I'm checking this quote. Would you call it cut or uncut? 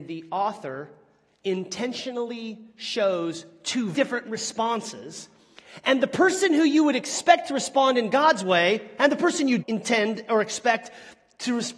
cut